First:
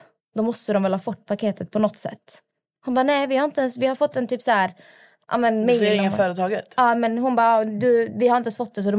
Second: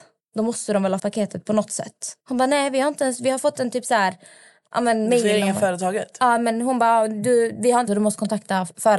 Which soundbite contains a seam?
second; 3 cuts; at 1.0 s, 2.2 s, 7.9 s

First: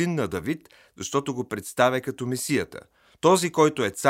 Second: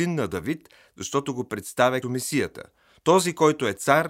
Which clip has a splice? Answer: second; 1 cut; at 2.0 s

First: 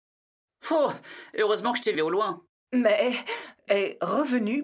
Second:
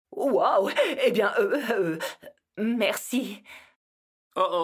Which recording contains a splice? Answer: first; 2 cuts; at 1.9 s, 3.7 s

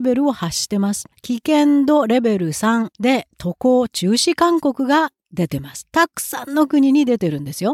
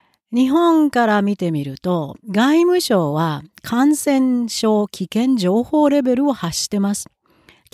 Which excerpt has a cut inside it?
first; 2 cuts; at 1.1 s, 2.9 s

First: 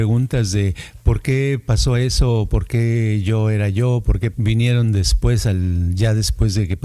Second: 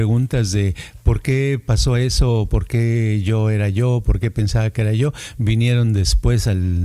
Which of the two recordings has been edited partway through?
first; 1 cut; at 4.3 s

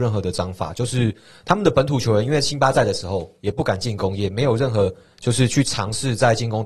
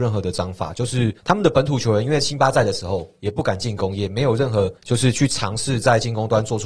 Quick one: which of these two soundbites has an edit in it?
second; 2 cuts; at 1.2 s, 4.8 s

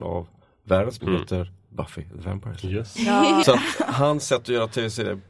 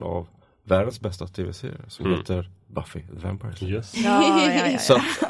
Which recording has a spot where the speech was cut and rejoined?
first; 2 cuts; at 1.0 s, 3.4 s

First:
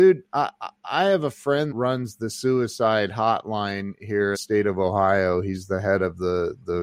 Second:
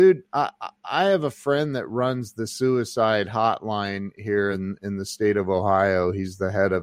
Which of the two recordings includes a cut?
first; 2 cuts; at 1.7 s, 4.3 s

